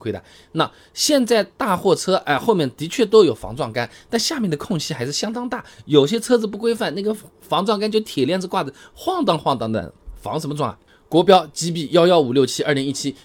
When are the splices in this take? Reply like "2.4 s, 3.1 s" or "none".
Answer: none